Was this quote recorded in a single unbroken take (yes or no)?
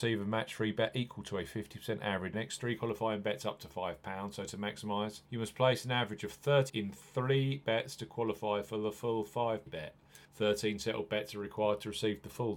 no